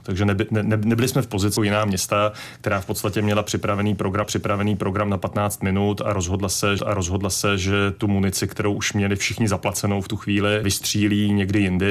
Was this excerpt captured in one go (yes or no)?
no